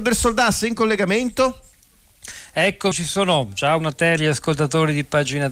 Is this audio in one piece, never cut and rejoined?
no; 3 cuts; at 2.9 s, 3.8 s, 4.2 s

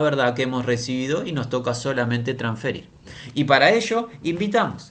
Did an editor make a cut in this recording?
no; 0 cuts

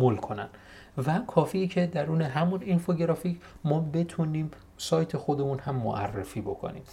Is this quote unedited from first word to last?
yes; 0 cuts

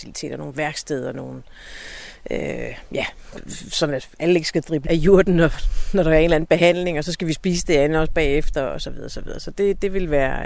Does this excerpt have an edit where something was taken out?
yes; 1 cut; at 4.9 s

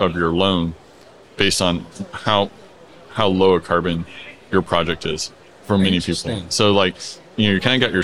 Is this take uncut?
yes; 0 cuts

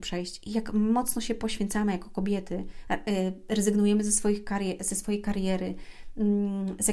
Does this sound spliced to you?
no; 0 cuts

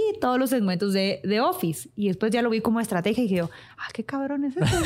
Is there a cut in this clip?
no; 0 cuts

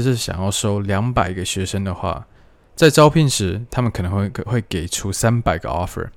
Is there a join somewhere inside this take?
no; 0 cuts

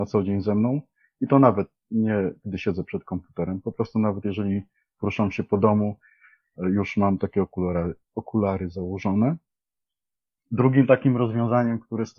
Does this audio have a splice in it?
no; 0 cuts

